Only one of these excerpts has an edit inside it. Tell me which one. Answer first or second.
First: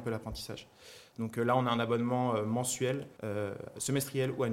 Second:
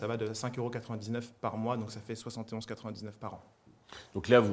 first